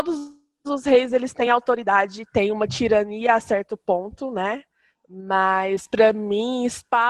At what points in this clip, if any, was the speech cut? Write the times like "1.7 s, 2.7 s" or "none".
none